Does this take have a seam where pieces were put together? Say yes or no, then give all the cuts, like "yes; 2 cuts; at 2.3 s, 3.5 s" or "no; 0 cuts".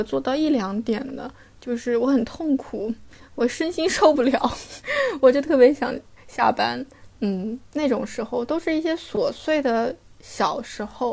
no; 0 cuts